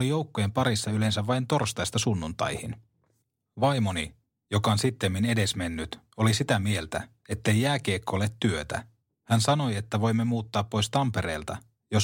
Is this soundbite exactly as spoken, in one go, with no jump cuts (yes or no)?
yes